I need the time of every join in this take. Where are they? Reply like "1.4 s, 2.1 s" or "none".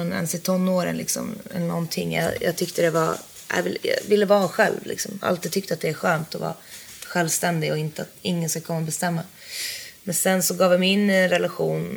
none